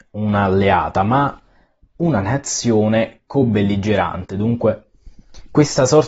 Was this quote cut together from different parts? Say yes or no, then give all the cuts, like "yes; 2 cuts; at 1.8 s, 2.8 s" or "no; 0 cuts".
no; 0 cuts